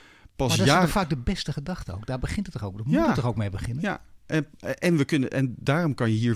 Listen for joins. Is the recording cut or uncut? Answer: uncut